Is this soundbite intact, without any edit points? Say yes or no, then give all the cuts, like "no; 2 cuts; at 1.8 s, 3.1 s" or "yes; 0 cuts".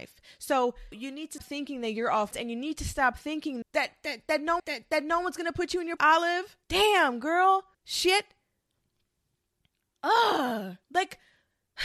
no; 9 cuts; at 0.9 s, 1.4 s, 2.3 s, 3.6 s, 4.6 s, 6.0 s, 6.6 s, 7.7 s, 10.8 s